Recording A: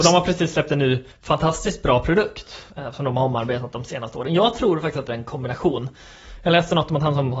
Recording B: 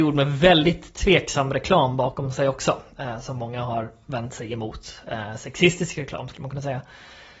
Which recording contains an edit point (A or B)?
A